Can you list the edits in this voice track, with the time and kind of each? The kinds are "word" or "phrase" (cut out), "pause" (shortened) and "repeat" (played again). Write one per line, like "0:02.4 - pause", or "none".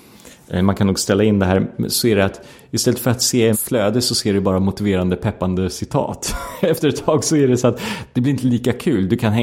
0:03.5 - word

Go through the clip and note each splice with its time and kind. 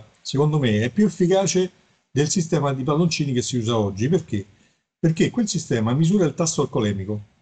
none

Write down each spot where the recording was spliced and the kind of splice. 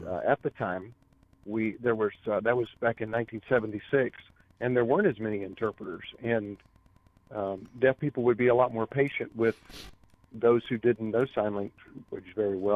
none

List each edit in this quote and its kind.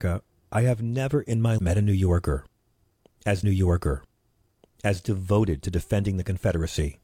0:01.6 - word
0:03.4 - repeat

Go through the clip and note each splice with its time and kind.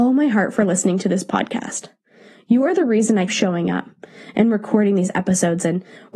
0:03.3 - word

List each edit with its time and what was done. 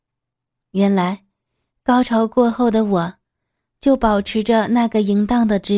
none

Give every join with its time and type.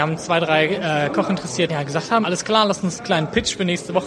0:01.7 - word
0:02.2 - word
0:03.0 - word

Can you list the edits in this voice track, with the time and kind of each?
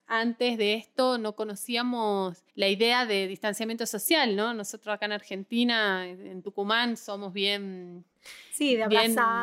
0:02.5 - pause

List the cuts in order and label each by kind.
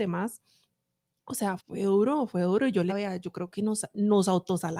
0:01.6 - word
0:02.9 - word
0:03.5 - phrase

